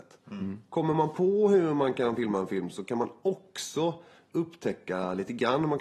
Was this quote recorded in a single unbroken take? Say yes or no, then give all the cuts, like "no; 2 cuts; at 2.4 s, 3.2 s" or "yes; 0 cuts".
yes; 0 cuts